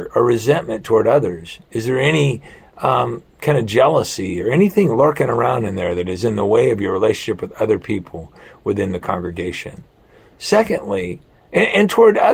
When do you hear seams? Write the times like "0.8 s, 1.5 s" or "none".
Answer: none